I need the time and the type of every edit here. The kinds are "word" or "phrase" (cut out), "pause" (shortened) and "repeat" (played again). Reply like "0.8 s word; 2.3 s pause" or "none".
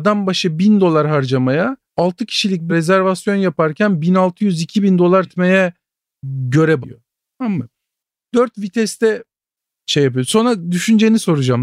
1.8 s pause; 2.7 s word; 5.3 s word; 6.8 s phrase